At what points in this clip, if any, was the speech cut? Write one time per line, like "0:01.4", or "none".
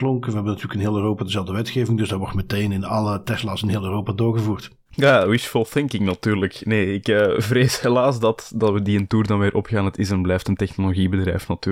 0:04.9

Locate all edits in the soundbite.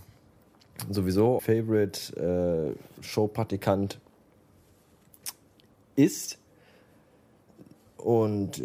0:01.4

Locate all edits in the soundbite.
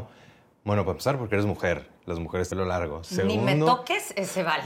0:02.5

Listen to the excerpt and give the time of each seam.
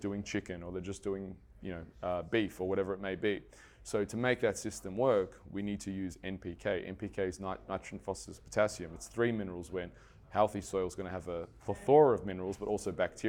none

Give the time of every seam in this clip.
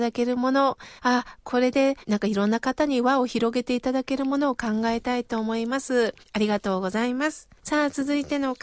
0:01.0
0:02.0
0:06.2
0:07.6

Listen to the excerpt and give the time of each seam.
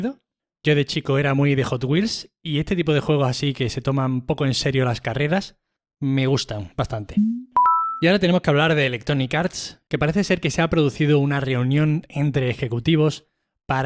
none

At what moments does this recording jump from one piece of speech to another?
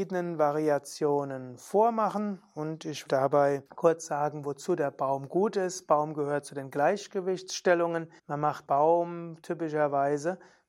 0:03.1
0:03.7
0:08.2
0:08.7

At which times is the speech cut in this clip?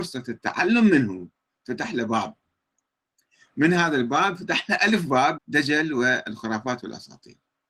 0:05.4

